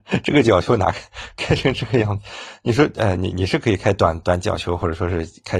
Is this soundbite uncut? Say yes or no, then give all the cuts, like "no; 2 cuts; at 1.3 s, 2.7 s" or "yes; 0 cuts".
yes; 0 cuts